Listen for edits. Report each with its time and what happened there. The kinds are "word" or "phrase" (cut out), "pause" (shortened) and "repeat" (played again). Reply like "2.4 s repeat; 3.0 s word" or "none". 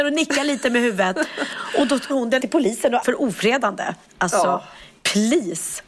2.1 s word; 2.4 s word; 3.0 s word